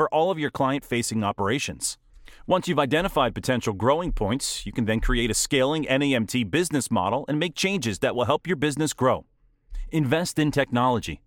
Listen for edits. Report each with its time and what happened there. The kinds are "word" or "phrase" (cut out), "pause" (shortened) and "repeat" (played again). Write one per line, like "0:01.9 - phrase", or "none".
none